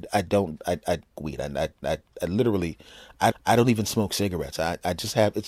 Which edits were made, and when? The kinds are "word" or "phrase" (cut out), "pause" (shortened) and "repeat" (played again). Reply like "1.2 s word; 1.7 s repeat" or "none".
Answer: 1.1 s phrase; 1.8 s repeat; 3.3 s repeat